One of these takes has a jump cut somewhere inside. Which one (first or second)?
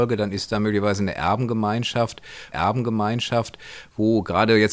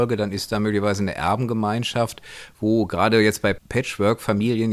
first